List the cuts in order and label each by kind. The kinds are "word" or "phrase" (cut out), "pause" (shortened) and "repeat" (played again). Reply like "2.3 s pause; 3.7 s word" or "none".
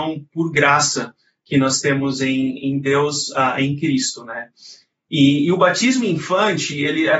none